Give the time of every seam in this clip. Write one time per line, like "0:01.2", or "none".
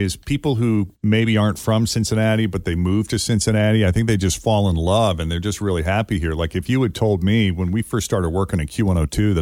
0:00.9